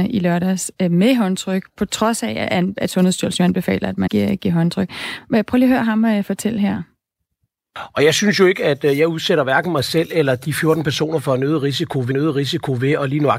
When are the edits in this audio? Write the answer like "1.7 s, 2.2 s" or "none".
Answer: 4.1 s, 12.1 s